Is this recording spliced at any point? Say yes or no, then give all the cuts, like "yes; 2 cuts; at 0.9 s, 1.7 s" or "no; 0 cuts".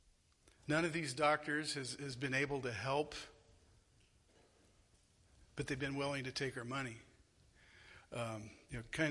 no; 0 cuts